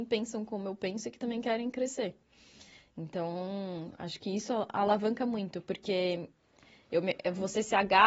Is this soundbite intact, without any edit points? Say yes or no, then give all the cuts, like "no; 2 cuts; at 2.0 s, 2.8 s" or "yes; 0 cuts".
yes; 0 cuts